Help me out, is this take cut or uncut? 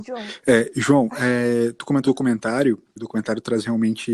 cut